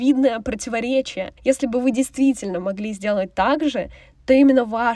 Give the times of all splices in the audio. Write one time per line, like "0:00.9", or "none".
none

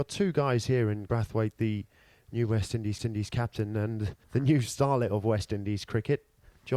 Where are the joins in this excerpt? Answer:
0:01.1
0:03.0
0:04.2

